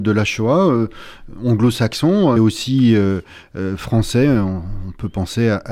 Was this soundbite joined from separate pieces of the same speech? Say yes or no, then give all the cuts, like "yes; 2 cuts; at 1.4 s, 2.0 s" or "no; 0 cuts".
yes; 1 cut; at 2.4 s